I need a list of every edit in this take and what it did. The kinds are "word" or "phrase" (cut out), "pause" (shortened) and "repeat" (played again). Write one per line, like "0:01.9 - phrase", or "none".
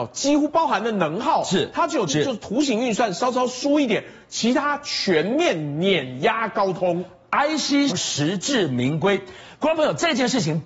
0:02.1 - word
0:07.9 - phrase

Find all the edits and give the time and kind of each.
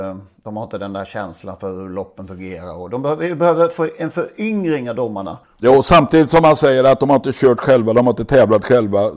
0:05.4 - pause

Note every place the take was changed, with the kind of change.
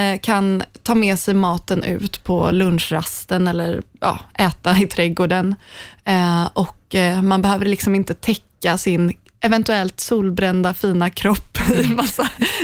none

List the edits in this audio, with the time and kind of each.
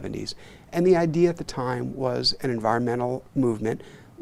0:03.3 - pause

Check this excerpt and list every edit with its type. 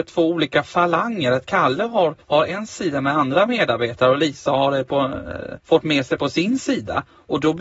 0:02.2 - pause
0:05.6 - pause

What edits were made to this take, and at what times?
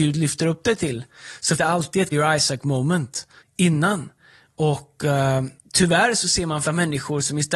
0:01.6 - word
0:02.1 - word
0:03.4 - word
0:05.6 - pause
0:06.6 - word

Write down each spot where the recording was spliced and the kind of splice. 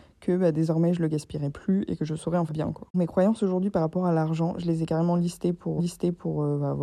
0:02.5 - phrase
0:05.8 - repeat

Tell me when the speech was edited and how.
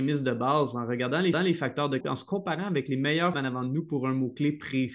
0:01.3 - repeat
0:02.0 - word
0:03.3 - phrase

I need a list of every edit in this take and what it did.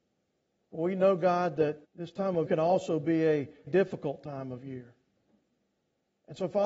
0:01.8 - pause
0:02.5 - word
0:03.7 - word

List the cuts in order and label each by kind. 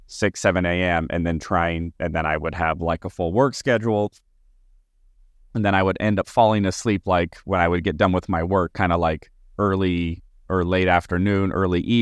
0:06.2 - word

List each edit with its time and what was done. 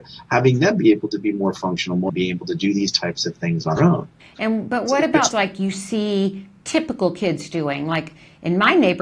0:02.1 - word
0:03.8 - word
0:04.2 - pause
0:05.3 - word

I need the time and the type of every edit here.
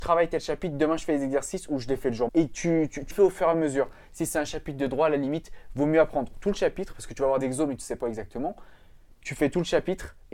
0:02.3 - word
0:03.1 - word
0:07.4 - word
0:08.0 - phrase

